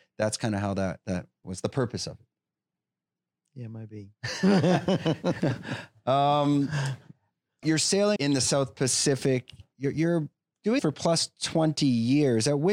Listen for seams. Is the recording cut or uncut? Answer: cut